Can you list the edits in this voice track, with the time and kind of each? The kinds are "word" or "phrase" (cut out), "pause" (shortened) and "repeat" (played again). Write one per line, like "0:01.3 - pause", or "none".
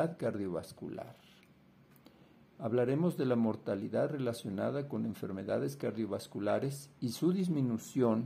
none